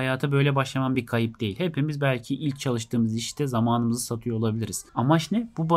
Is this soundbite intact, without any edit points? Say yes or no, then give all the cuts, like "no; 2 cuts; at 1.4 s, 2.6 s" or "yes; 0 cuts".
yes; 0 cuts